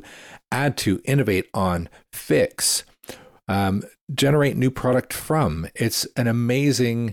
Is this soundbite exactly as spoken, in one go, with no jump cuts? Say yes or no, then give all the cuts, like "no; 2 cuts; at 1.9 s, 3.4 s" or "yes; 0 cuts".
yes; 0 cuts